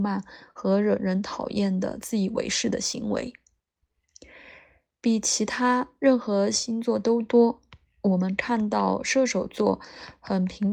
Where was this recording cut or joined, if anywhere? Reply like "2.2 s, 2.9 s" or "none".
none